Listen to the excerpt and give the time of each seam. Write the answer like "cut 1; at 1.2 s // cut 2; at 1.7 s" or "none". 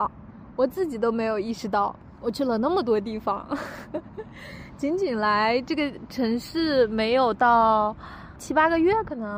cut 1; at 8.4 s